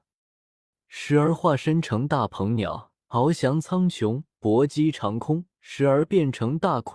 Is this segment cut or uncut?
cut